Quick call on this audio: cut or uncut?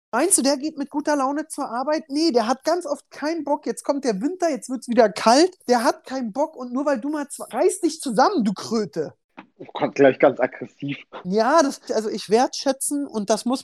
cut